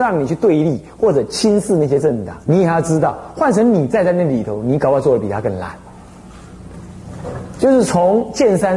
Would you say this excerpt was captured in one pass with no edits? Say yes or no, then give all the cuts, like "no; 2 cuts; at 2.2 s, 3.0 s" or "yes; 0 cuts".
no; 1 cut; at 2.4 s